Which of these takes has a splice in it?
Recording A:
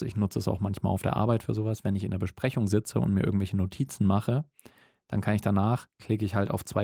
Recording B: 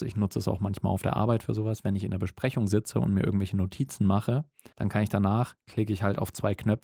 B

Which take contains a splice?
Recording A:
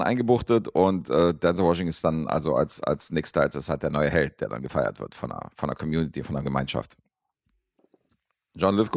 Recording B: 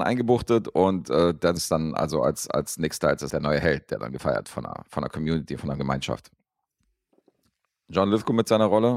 B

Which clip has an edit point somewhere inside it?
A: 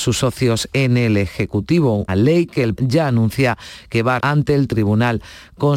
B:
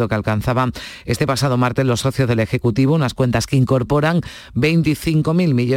A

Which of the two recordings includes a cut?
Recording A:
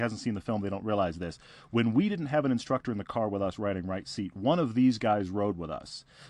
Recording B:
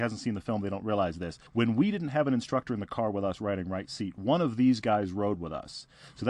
B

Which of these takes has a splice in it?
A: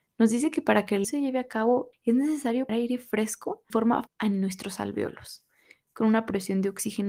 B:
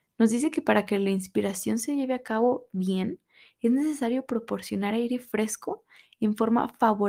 A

